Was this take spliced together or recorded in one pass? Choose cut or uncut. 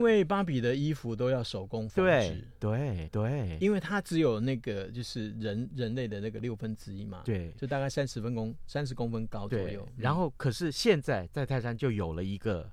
cut